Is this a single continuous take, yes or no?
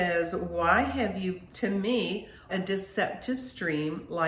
no